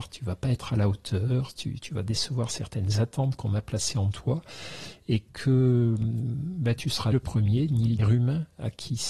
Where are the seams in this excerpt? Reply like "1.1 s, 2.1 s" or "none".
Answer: 1.8 s, 7.1 s, 8.0 s